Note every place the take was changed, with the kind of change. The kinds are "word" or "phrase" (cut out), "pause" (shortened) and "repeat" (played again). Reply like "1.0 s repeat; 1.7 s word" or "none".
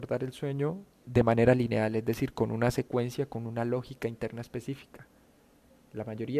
1.0 s word